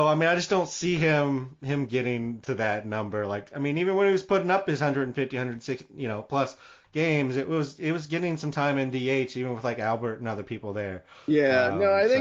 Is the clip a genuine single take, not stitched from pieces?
yes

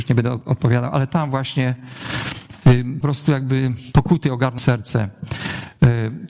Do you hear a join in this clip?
yes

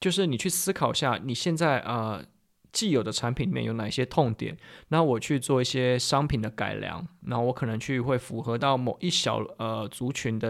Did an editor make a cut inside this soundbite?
no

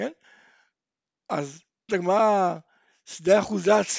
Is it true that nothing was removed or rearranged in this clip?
no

